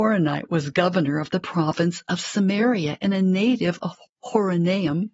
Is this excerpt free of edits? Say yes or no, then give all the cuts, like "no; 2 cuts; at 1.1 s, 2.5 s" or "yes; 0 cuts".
yes; 0 cuts